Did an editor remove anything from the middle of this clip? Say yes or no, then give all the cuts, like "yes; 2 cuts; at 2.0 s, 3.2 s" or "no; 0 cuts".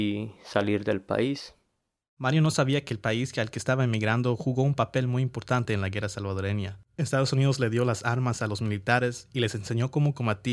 no; 0 cuts